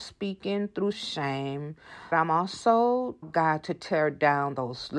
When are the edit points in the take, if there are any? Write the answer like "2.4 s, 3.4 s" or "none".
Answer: 0.9 s, 2.1 s, 3.2 s